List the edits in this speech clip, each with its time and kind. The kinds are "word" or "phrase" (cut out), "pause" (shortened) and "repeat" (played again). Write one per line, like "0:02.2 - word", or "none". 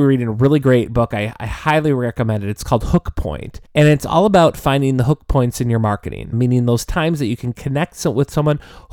0:03.6 - pause
0:06.3 - word